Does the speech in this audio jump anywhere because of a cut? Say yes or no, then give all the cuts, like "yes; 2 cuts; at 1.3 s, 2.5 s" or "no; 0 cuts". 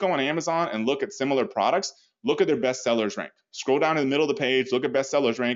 no; 0 cuts